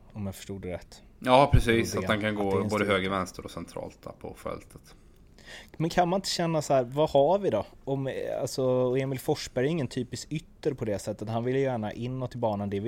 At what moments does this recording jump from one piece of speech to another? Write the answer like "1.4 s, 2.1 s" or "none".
none